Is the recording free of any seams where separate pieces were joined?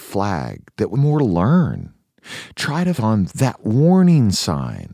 no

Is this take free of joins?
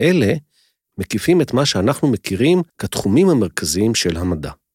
no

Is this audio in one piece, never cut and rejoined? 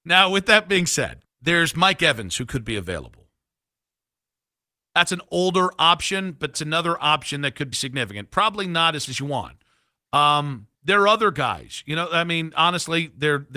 no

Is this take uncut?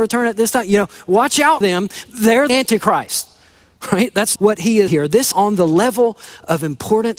no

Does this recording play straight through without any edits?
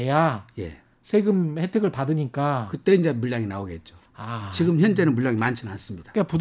no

